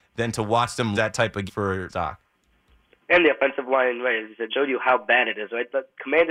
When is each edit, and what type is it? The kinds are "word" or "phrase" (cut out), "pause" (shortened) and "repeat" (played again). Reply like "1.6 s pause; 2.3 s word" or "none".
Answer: 0.9 s word; 1.5 s word; 1.9 s word; 4.5 s word